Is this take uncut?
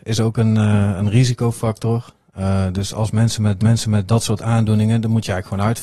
no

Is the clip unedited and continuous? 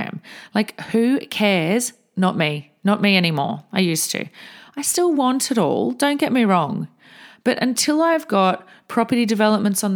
yes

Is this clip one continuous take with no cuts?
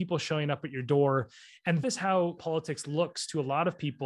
no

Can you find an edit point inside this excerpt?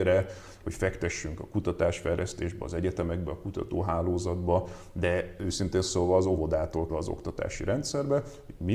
yes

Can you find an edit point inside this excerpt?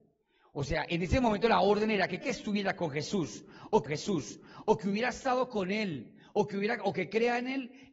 yes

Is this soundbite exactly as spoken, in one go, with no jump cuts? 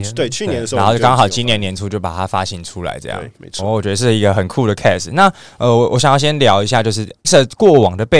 no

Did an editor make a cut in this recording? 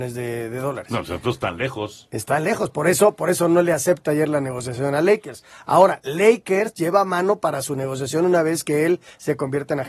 no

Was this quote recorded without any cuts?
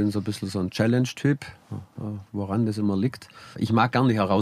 no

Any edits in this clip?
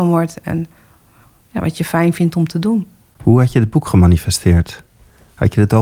no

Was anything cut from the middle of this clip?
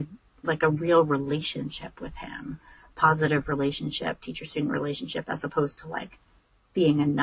no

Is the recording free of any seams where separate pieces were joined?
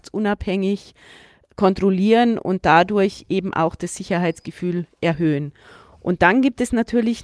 yes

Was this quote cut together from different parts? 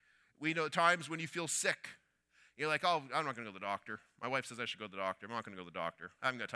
no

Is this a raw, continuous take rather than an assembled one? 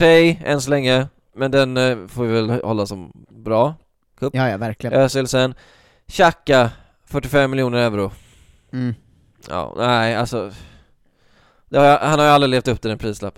yes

